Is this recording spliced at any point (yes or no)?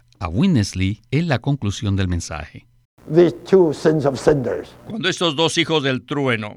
yes